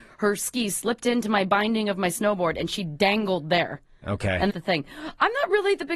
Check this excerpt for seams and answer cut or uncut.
cut